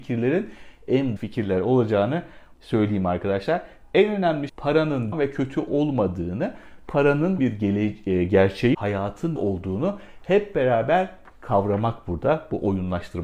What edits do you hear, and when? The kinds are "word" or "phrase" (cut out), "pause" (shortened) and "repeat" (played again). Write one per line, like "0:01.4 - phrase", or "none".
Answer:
0:01.2 - word
0:02.5 - word
0:04.5 - word
0:05.1 - word
0:07.4 - word
0:08.7 - word
0:09.4 - word